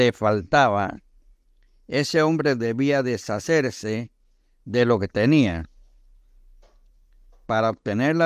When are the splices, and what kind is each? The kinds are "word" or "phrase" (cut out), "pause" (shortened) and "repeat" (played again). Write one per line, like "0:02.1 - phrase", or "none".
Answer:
none

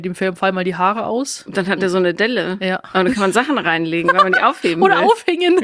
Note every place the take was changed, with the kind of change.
none

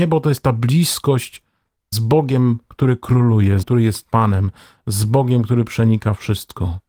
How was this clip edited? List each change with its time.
0:01.9 - word
0:03.6 - word

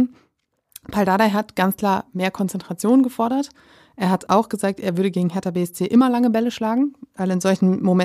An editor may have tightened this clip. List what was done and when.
0:04.3 - word

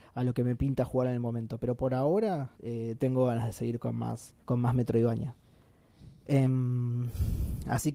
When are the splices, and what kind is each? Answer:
0:02.5 - pause
0:04.4 - pause
0:06.2 - pause

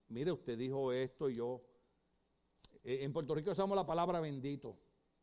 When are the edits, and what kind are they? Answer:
none

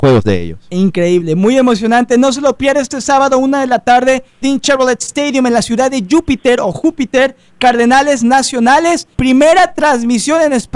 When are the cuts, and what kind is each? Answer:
0:04.4 - phrase
0:09.1 - pause

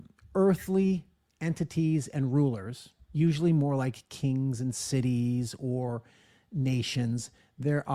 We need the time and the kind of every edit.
none

